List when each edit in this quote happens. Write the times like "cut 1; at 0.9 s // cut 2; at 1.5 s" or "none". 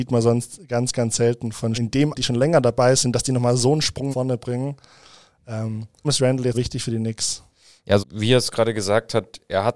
cut 1; at 1.7 s // cut 2; at 2.1 s // cut 3; at 4.1 s // cut 4; at 6.0 s // cut 5; at 6.5 s // cut 6; at 8.0 s